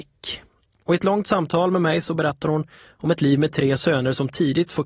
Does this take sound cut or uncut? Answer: uncut